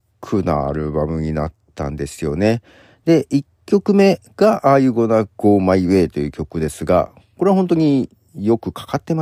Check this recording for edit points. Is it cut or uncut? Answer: uncut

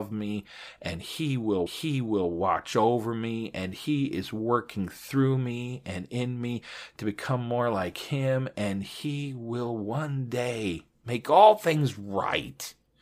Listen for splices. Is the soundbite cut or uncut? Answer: cut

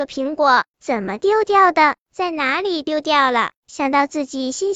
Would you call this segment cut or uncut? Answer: cut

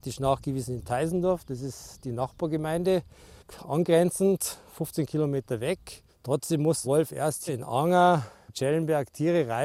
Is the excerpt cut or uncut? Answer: cut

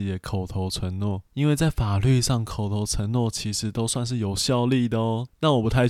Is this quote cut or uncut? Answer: cut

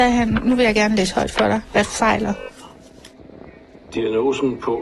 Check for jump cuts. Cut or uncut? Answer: uncut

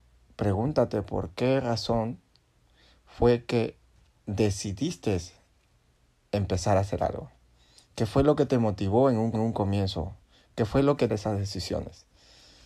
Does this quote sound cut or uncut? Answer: cut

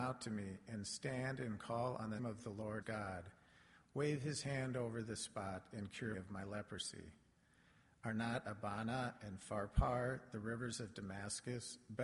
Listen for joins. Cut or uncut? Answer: cut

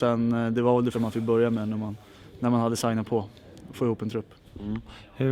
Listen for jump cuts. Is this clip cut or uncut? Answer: cut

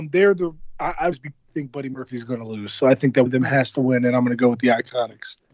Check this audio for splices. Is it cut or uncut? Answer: cut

